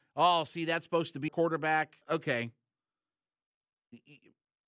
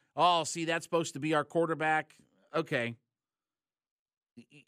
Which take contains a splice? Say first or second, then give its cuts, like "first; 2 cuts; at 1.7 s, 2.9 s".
first; 2 cuts; at 1.3 s, 2.0 s